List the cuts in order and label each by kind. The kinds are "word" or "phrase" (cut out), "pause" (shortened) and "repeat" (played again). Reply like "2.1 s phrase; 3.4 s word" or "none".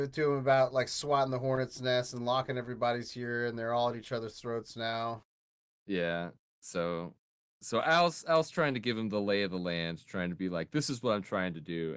none

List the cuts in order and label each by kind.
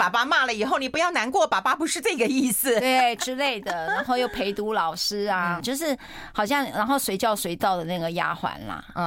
5.6 s word

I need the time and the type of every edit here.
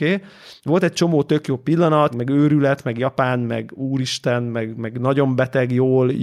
2.1 s word

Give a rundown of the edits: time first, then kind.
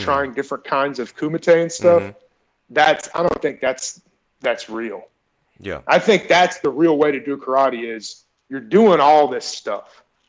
none

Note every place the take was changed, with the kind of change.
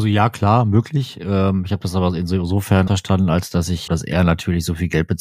2.9 s word; 3.9 s phrase

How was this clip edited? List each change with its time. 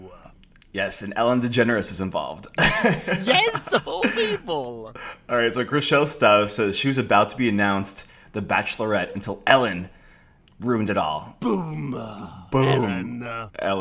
none

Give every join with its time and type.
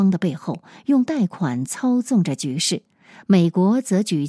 none

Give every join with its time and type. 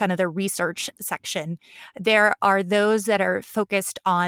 none

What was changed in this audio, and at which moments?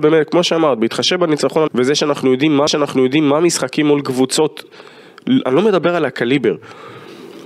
1.7 s word; 2.7 s repeat

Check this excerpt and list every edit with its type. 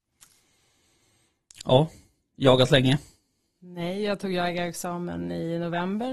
none

